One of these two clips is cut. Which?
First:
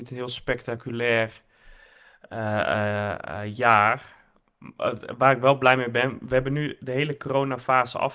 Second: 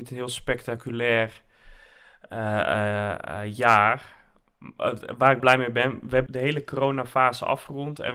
second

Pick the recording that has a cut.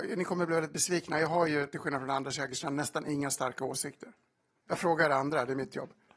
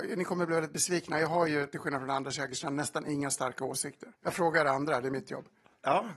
second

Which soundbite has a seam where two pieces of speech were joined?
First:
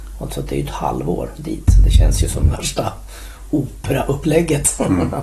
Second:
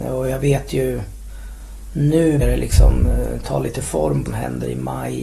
second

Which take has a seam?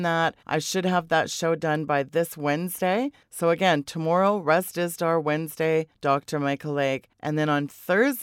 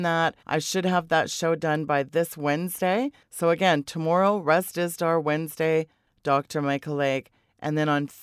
first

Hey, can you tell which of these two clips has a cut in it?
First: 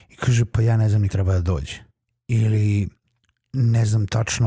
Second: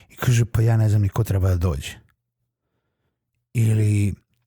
first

